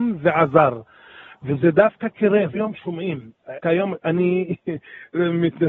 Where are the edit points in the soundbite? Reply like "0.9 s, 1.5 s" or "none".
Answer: 2.5 s, 3.6 s